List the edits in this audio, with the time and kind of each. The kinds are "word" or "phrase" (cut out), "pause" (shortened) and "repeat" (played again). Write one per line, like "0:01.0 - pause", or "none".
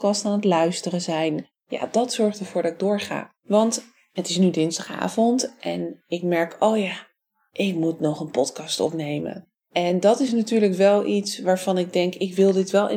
none